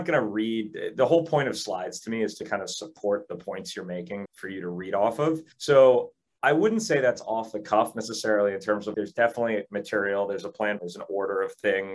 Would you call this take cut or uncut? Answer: cut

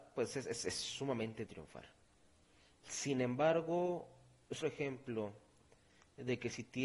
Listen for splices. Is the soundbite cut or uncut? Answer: cut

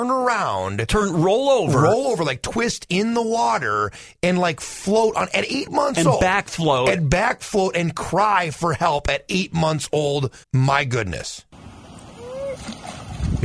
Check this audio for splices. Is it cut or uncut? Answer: cut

